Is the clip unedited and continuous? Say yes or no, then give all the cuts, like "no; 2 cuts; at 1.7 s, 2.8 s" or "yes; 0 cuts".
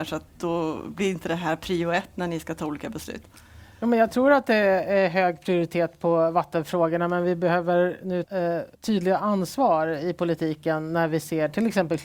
no; 2 cuts; at 8.2 s, 8.7 s